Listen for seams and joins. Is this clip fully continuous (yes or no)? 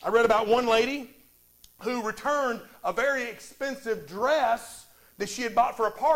yes